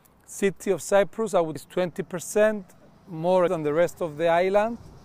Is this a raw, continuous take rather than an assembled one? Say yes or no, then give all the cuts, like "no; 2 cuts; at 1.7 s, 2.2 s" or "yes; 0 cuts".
no; 2 cuts; at 1.6 s, 3.5 s